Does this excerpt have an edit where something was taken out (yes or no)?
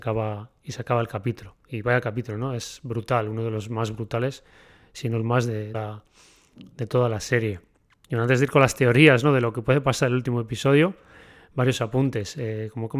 yes